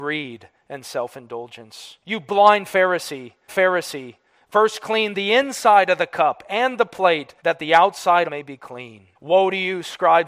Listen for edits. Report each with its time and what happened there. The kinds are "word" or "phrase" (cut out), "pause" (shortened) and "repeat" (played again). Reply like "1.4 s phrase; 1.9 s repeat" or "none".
2.0 s pause; 3.5 s repeat; 7.4 s pause; 8.3 s word; 9.2 s pause